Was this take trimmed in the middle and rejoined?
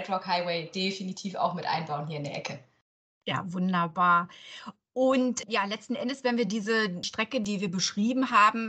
no; 0 cuts

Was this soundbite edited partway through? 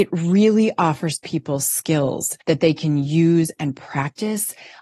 yes; 1 cut; at 2.4 s

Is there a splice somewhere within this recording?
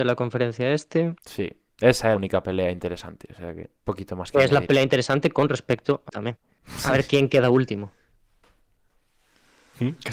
yes; 4 cuts; at 1.2 s, 2.2 s, 3.8 s, 6.1 s

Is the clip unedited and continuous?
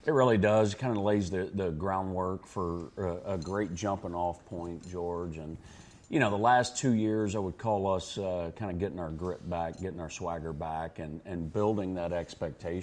yes; 0 cuts

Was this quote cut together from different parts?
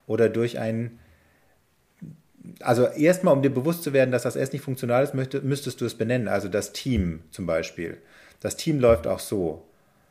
no; 0 cuts

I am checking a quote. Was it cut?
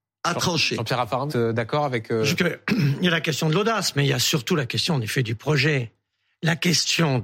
yes; 2 cuts; at 1.3 s, 2.4 s

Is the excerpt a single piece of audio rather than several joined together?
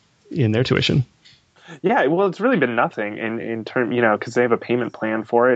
yes; 0 cuts

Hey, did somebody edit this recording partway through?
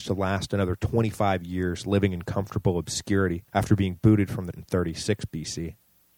yes; 2 cuts; at 3.5 s, 4.5 s

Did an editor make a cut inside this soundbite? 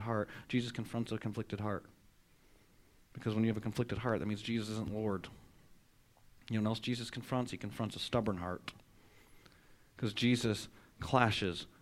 no; 0 cuts

